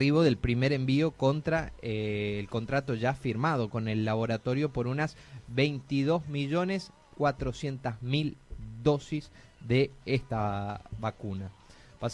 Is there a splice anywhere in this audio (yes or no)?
no